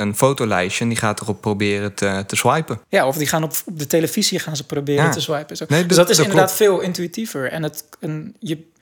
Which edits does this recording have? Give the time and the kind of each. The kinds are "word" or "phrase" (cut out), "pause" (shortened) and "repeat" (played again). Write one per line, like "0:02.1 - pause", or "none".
0:02.8 - pause